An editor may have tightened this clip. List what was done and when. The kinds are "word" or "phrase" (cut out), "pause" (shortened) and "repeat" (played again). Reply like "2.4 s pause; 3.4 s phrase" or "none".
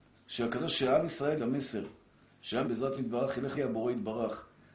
1.4 s word; 2.6 s word; 3.0 s word; 3.5 s word